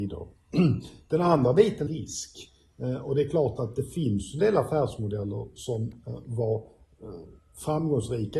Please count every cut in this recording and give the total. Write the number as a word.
one